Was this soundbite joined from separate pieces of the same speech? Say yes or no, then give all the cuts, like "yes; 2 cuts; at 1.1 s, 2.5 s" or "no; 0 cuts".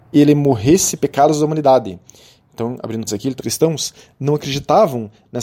yes; 3 cuts; at 1.0 s, 3.1 s, 3.4 s